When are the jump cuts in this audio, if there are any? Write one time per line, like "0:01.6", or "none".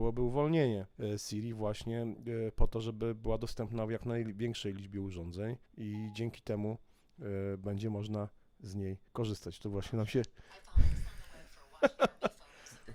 0:00.9
0:05.7
0:09.1